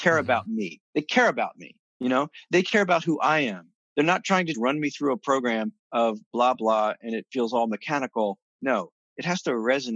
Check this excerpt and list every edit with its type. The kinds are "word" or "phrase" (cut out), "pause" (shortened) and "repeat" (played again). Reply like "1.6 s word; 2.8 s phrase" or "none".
1.9 s pause; 4.5 s word; 5.8 s pause; 6.5 s word